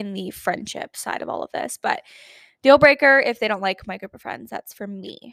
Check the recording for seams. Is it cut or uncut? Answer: uncut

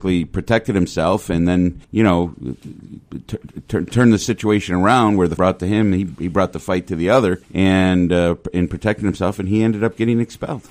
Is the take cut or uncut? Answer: cut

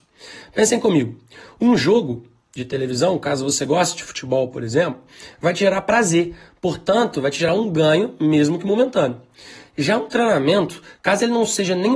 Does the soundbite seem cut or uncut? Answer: uncut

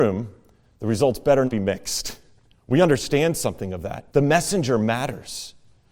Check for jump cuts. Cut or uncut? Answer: cut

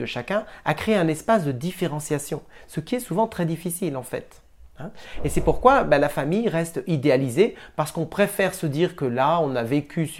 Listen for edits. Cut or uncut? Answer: uncut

